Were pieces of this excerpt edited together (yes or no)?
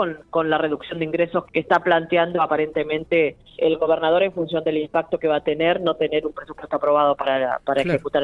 yes